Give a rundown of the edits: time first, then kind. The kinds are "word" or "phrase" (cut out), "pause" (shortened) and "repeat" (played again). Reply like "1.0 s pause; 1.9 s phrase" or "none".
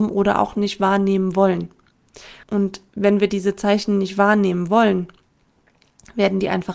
2.4 s pause